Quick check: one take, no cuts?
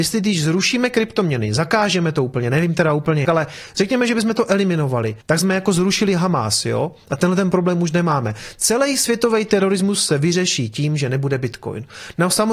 no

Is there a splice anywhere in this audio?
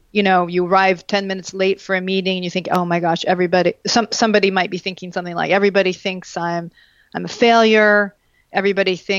no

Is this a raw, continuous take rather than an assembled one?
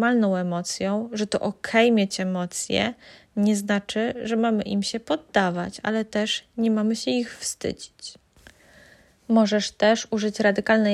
yes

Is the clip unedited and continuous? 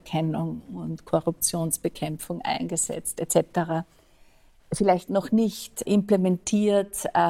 no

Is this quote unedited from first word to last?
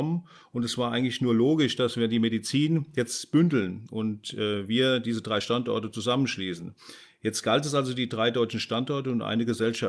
yes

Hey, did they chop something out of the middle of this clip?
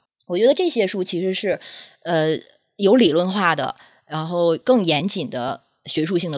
no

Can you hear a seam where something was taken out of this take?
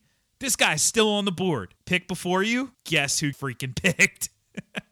yes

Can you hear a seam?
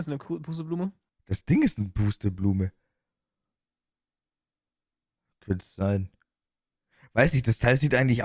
no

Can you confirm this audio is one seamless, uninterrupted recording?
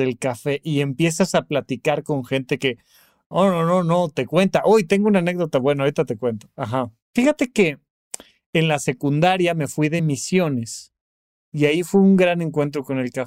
yes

